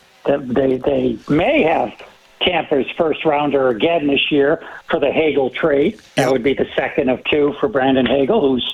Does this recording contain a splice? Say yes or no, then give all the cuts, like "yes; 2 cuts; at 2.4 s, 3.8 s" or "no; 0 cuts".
yes; 1 cut; at 6.0 s